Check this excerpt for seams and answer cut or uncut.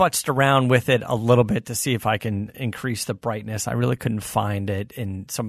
uncut